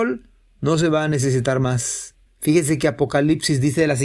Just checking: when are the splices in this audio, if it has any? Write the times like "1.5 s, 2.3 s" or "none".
2.3 s